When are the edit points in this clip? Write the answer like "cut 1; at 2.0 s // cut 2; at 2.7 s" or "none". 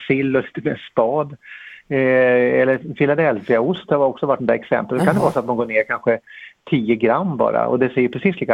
cut 1; at 4.4 s